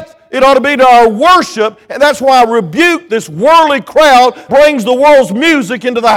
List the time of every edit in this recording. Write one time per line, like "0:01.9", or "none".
0:04.5